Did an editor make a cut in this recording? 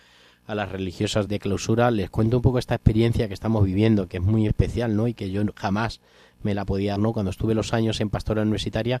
yes; 3 cuts; at 1.3 s, 4.5 s, 7.0 s

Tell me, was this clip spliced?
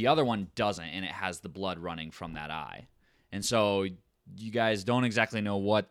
no; 0 cuts

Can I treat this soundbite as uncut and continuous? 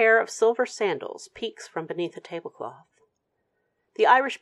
yes; 0 cuts

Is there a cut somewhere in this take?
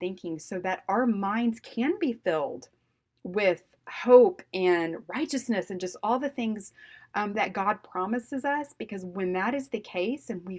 no; 0 cuts

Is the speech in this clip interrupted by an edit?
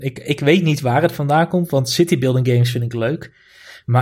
no; 0 cuts

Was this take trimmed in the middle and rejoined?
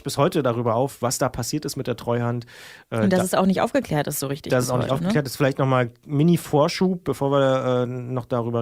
no; 0 cuts

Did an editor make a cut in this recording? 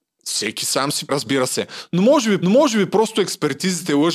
yes; 2 cuts; at 1.1 s, 2.4 s

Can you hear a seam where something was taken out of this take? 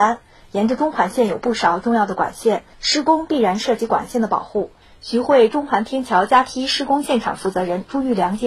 yes; 1 cut; at 2.7 s

